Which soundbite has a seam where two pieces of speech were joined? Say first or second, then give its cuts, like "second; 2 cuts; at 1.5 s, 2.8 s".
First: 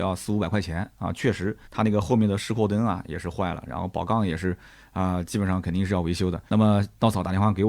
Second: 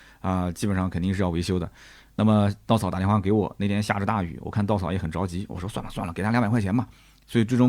first; 2 cuts; at 1.6 s, 6.5 s